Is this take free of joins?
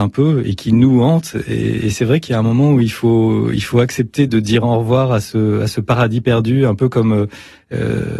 yes; 0 cuts

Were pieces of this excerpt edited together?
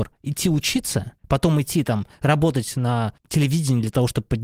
yes; 2 cuts; at 1.2 s, 3.2 s

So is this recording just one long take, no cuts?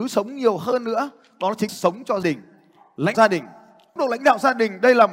no; 4 cuts; at 1.7 s, 2.2 s, 3.1 s, 4.0 s

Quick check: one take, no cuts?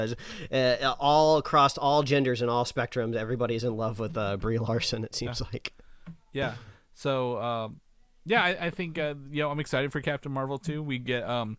yes; 0 cuts

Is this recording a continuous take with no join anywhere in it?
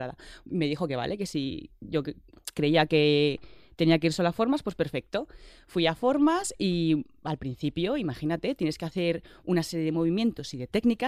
yes; 0 cuts

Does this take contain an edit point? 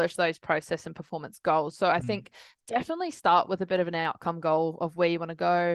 no; 0 cuts

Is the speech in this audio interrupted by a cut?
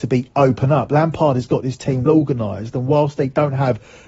yes; 1 cut; at 2.1 s

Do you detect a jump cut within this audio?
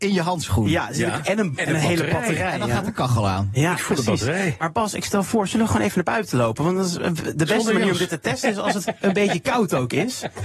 no; 0 cuts

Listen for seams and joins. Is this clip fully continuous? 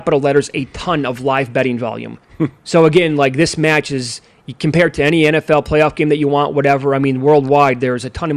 no; 1 cut; at 2.2 s

